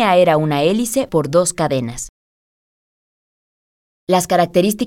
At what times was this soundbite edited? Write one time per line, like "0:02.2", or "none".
0:01.1